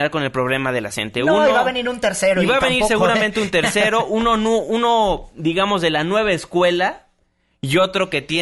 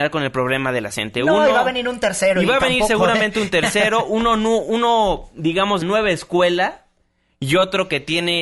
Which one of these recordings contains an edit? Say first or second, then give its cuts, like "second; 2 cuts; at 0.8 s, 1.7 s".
second; 1 cut; at 5.8 s